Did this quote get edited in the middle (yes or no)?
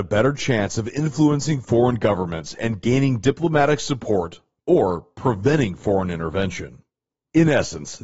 no